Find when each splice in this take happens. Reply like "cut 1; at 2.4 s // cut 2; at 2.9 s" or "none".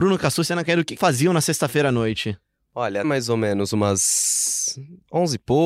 cut 1; at 1.0 s // cut 2; at 3.0 s